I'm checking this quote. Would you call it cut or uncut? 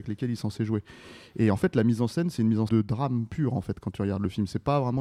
cut